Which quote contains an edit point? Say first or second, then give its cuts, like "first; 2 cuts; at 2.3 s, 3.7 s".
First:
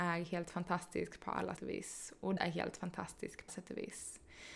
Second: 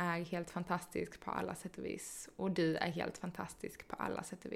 first; 3 cuts; at 1.6 s, 2.4 s, 3.5 s